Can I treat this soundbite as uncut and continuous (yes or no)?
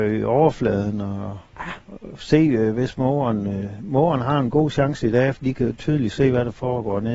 no